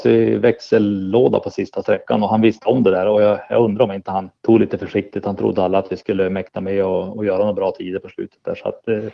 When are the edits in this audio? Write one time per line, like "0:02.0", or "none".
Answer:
0:04.4